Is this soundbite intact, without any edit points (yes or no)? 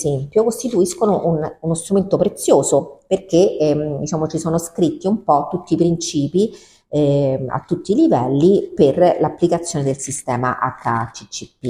yes